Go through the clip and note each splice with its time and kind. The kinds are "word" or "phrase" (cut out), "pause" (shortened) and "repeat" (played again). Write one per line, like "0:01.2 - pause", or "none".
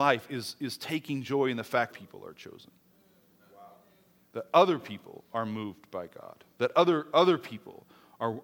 0:01.9 - phrase
0:06.5 - pause

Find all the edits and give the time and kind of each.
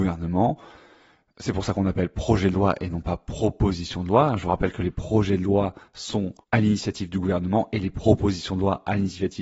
0:06.4 - pause

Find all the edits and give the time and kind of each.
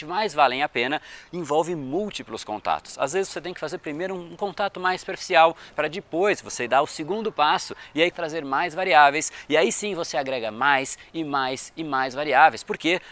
0:08.1 - word

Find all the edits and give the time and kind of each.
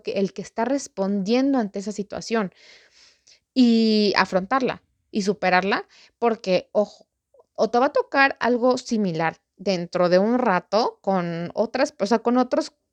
none

